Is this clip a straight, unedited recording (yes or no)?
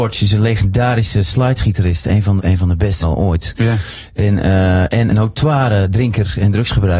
no